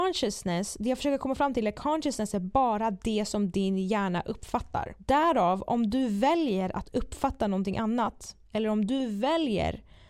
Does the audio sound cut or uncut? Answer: uncut